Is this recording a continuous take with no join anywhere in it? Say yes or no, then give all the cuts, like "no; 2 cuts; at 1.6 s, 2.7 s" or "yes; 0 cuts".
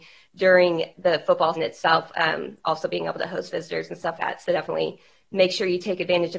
no; 3 cuts; at 0.9 s, 1.6 s, 4.2 s